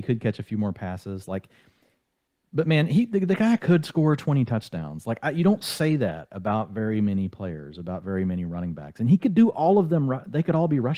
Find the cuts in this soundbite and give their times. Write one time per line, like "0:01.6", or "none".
none